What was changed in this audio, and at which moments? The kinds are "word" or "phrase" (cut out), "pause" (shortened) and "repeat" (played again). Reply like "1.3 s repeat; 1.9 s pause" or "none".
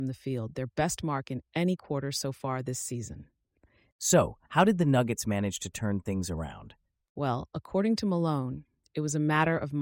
none